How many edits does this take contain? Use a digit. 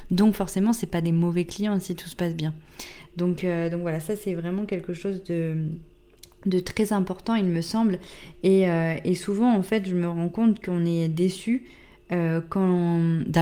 0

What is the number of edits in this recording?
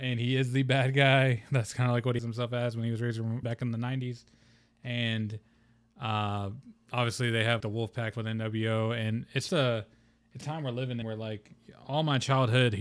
7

